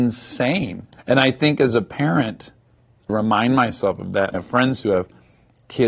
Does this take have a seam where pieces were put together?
yes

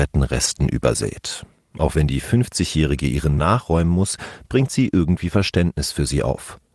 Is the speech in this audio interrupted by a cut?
yes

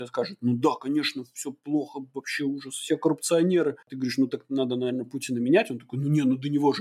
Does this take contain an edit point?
yes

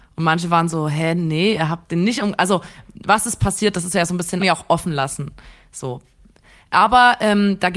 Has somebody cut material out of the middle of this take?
yes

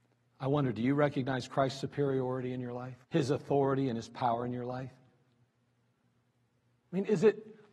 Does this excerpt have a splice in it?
yes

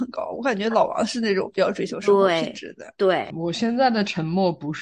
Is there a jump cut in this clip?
yes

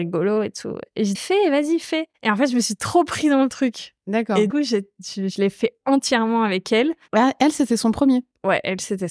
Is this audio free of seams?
no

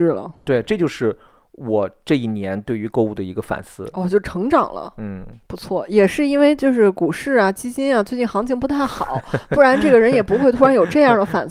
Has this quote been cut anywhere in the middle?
no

